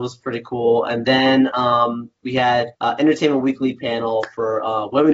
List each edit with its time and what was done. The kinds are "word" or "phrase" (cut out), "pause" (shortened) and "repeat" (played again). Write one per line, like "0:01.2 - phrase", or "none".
0:02.7 - pause